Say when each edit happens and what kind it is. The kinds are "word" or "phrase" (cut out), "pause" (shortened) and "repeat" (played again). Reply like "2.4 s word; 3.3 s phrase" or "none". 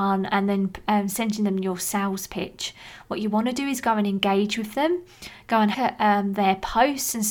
5.7 s phrase